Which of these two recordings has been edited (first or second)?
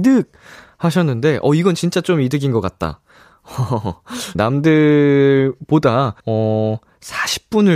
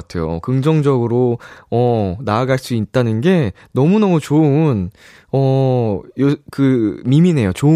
first